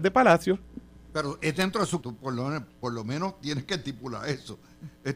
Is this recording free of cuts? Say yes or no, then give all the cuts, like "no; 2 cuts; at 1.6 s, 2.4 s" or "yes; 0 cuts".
no; 2 cuts; at 2.0 s, 2.7 s